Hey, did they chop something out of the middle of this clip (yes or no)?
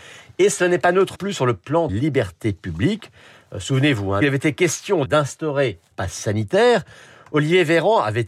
yes